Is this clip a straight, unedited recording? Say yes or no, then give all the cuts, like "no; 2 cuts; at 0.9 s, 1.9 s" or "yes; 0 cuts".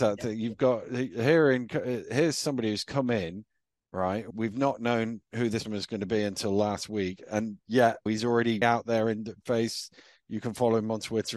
no; 4 cuts; at 4.3 s, 5.6 s, 8.1 s, 8.6 s